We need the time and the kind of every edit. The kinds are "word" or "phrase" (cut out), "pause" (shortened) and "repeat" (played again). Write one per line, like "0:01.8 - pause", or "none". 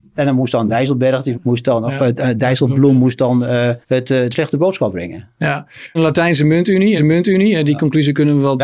0:01.3 - word
0:03.8 - pause
0:04.3 - phrase
0:05.9 - phrase
0:07.0 - repeat